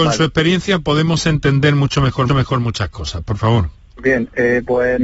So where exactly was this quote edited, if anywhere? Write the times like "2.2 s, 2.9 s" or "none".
2.3 s